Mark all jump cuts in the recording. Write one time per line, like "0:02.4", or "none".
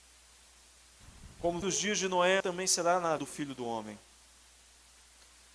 0:01.6
0:02.4
0:03.2